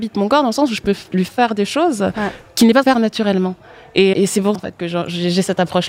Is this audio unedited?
no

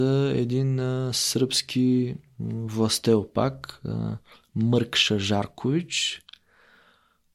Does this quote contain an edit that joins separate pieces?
no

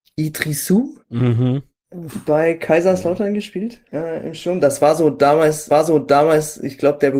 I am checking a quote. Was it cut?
yes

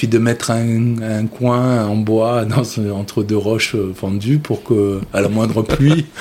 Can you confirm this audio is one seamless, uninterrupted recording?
yes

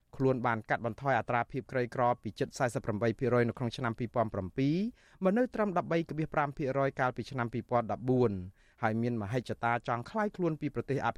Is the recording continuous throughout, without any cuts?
yes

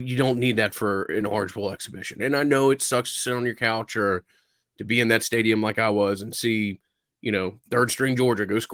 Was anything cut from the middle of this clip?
no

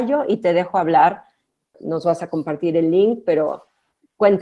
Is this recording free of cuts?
yes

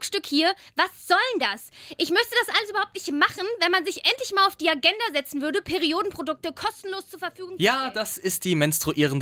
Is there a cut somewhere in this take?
no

